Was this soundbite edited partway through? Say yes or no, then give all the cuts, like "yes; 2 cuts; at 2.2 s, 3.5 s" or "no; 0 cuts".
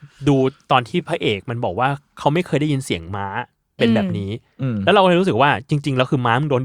no; 0 cuts